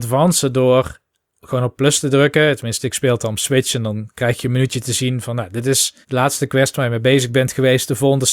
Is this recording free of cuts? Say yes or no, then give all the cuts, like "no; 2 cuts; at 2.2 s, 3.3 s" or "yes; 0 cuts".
no; 1 cut; at 6.0 s